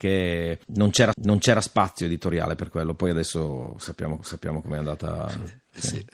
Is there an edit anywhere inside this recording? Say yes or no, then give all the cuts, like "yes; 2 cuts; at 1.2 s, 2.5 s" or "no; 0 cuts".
yes; 2 cuts; at 1.1 s, 4.2 s